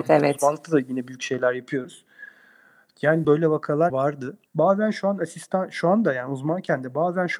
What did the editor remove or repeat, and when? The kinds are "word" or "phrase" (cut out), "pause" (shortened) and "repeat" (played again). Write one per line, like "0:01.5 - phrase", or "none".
0:03.2 - word
0:03.9 - word
0:04.5 - pause